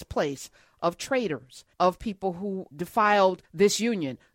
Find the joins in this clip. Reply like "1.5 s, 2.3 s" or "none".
1.7 s, 2.7 s, 3.4 s